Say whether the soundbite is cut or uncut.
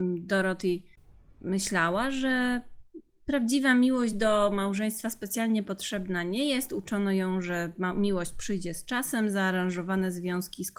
uncut